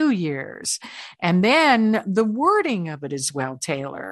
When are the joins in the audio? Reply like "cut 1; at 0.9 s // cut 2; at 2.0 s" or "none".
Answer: none